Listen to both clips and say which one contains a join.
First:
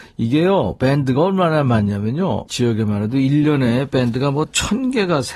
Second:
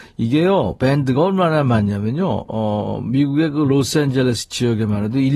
first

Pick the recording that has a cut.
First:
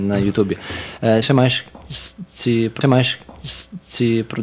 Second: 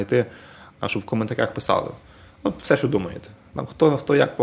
first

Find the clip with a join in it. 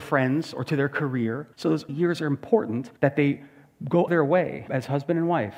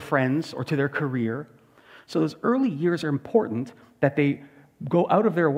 first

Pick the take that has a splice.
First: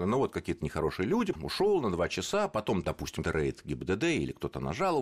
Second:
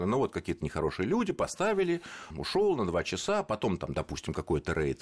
first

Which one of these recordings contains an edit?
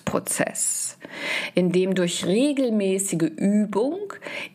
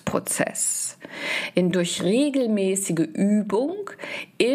second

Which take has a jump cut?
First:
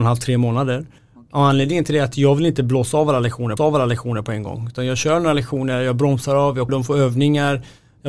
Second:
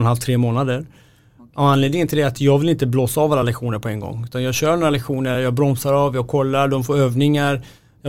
first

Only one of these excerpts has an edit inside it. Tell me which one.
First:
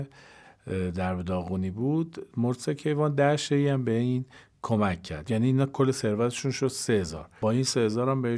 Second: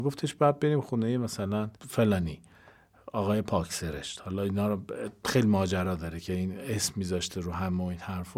second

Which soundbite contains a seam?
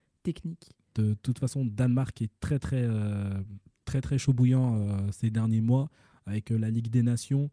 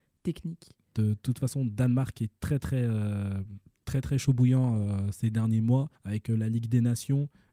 second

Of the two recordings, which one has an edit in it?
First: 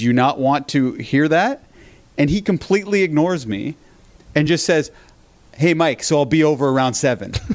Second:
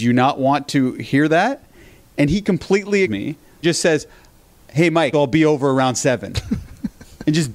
second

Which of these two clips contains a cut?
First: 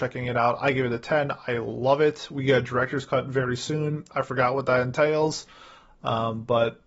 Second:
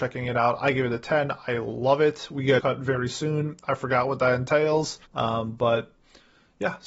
second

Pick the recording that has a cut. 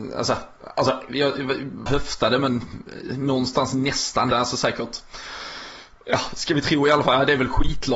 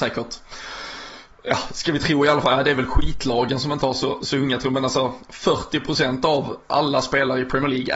first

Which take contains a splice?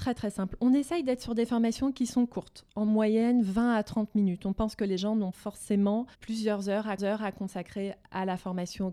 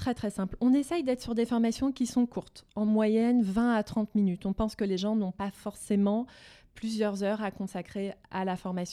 first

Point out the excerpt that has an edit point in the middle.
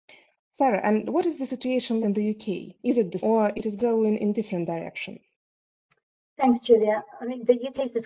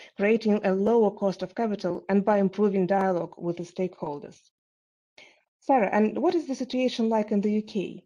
first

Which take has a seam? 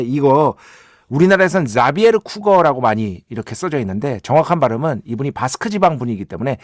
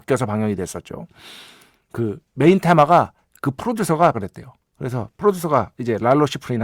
second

